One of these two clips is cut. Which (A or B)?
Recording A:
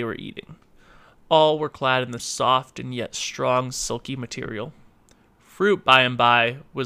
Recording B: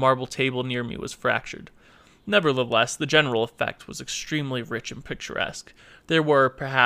A